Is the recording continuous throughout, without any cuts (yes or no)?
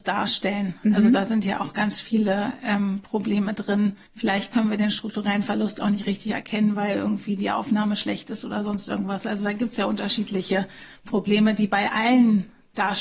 no